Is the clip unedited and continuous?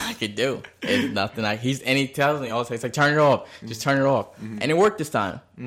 yes; 0 cuts

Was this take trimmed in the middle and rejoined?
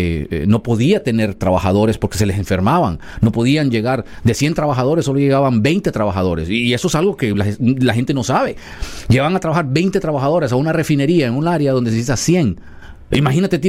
no; 0 cuts

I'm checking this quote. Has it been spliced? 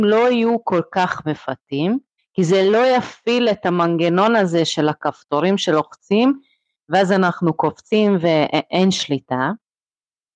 yes; 1 cut; at 2.2 s

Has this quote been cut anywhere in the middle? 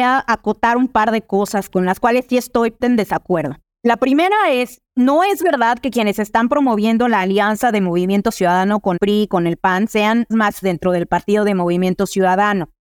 yes; 6 cuts; at 2.8 s, 3.6 s, 4.9 s, 9.0 s, 10.3 s, 10.6 s

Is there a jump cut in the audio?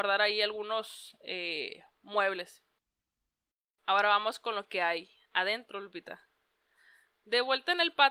no; 0 cuts

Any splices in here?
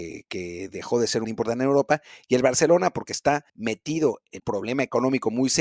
yes; 3 cuts; at 1.2 s, 3.5 s, 4.4 s

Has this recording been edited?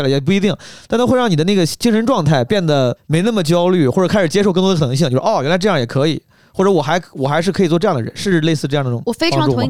no; 0 cuts

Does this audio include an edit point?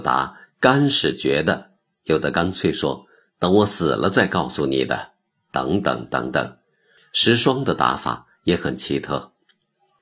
no; 0 cuts

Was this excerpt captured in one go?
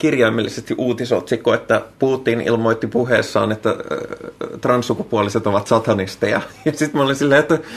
yes; 0 cuts

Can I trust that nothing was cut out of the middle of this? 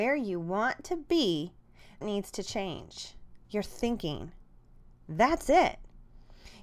no; 2 cuts; at 2.0 s, 3.4 s

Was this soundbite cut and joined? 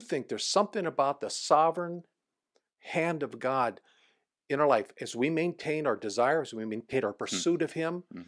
no; 0 cuts

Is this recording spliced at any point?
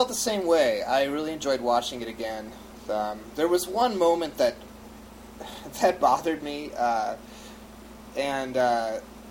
no; 0 cuts

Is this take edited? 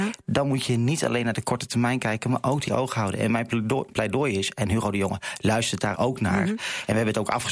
yes; 2 cuts; at 2.7 s, 5.9 s

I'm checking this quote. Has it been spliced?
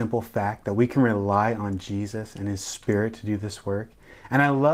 no; 0 cuts

